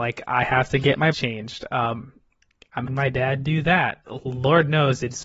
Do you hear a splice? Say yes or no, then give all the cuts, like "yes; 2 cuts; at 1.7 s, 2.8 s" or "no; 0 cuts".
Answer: yes; 3 cuts; at 1.1 s, 2.9 s, 4.1 s